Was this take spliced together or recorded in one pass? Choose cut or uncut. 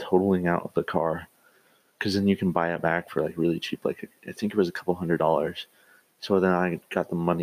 uncut